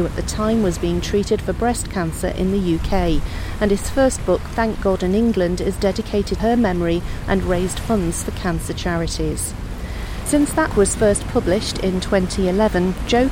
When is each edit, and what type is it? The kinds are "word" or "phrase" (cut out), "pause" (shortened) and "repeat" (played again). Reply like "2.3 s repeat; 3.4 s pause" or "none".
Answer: 4.5 s word; 6.4 s word; 10.7 s word